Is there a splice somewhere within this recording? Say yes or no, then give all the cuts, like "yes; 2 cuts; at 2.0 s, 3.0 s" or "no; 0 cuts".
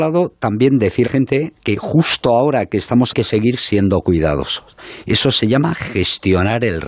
yes; 2 cuts; at 1.1 s, 3.1 s